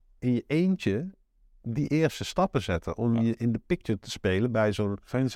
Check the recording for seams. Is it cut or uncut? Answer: uncut